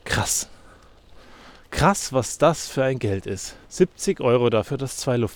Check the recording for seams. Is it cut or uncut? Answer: cut